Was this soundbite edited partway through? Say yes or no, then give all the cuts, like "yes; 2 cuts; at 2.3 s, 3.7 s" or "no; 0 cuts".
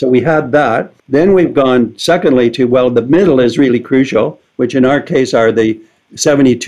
yes; 1 cut; at 1.0 s